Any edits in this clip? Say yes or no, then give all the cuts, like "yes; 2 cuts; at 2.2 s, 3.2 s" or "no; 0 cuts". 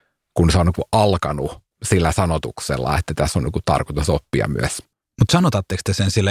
yes; 2 cuts; at 1.7 s, 4.9 s